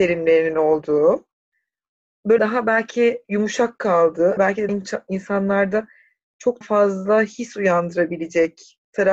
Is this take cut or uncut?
cut